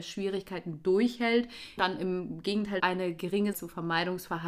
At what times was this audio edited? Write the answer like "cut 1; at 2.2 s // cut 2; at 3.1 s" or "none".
cut 1; at 1.8 s // cut 2; at 2.8 s // cut 3; at 3.5 s